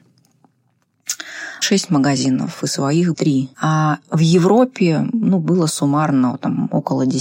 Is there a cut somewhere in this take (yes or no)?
yes